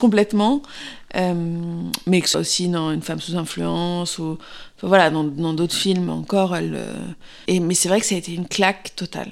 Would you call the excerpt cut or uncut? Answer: cut